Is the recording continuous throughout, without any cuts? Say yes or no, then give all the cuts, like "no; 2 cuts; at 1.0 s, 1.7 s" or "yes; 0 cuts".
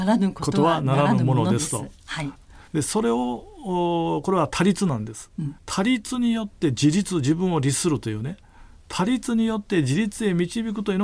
no; 2 cuts; at 2.7 s, 5.6 s